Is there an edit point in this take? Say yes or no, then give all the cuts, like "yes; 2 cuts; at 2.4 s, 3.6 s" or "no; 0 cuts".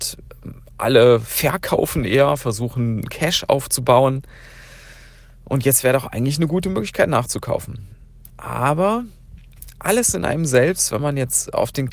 yes; 1 cut; at 8.3 s